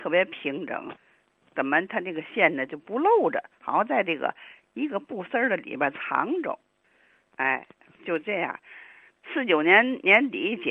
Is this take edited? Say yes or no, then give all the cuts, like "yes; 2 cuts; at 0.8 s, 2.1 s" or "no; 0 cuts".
no; 0 cuts